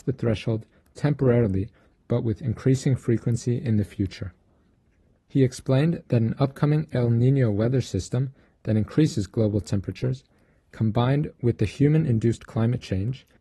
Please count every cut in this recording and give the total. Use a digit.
0